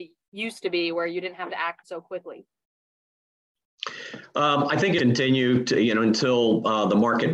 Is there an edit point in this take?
yes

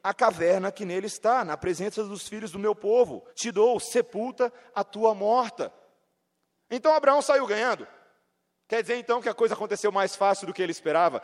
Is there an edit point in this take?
yes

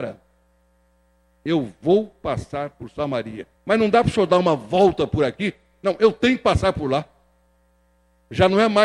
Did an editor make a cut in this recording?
yes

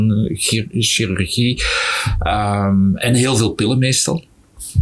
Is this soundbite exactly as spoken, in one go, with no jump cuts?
yes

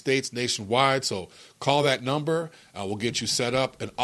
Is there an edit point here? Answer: no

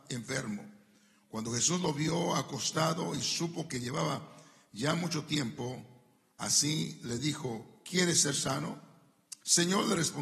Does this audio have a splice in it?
no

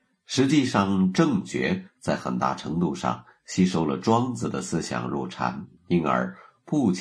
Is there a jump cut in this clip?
yes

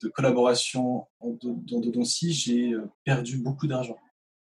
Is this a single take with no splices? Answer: no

